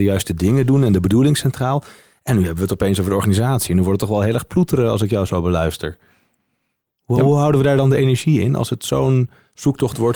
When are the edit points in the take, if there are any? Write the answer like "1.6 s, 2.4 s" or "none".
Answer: none